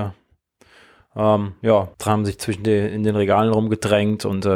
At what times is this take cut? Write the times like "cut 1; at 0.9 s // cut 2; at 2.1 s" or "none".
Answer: cut 1; at 1.9 s

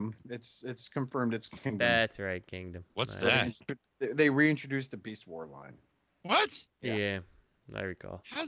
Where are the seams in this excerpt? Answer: cut 1; at 6.7 s

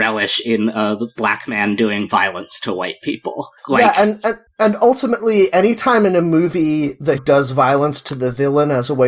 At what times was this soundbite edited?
cut 1; at 3.6 s // cut 2; at 7.2 s

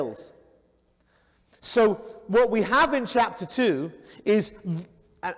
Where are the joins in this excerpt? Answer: none

